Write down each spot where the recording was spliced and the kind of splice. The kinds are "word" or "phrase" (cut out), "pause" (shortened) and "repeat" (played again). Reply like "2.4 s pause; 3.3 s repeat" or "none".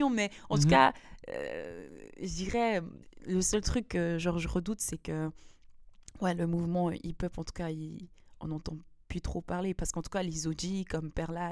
3.0 s pause